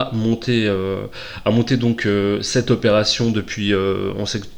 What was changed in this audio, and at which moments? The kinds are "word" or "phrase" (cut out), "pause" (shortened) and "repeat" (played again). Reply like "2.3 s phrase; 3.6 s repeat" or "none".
none